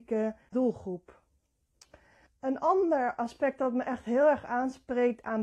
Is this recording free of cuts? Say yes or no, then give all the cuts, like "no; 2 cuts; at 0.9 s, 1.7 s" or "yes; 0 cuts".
yes; 0 cuts